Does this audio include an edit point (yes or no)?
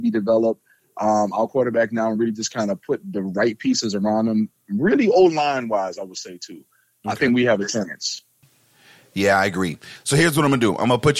no